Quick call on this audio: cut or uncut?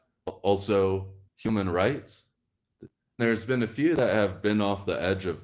cut